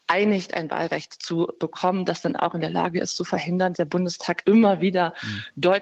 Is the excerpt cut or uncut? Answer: cut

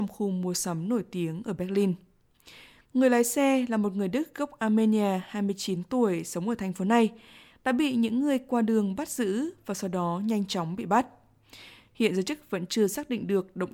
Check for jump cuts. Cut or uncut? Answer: uncut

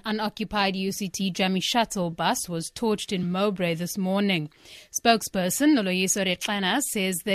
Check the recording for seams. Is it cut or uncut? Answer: uncut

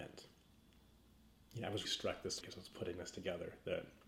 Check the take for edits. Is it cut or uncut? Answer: cut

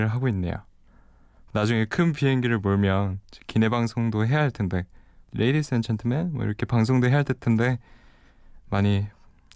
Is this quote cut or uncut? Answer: uncut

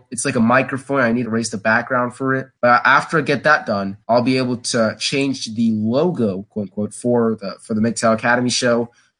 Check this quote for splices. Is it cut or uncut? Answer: cut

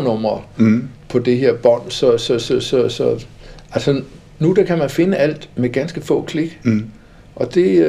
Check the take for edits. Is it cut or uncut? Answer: cut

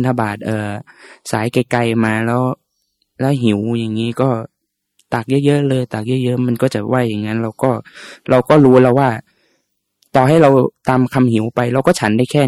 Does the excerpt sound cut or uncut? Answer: uncut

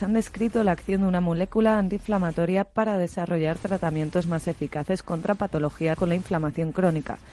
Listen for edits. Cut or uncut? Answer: cut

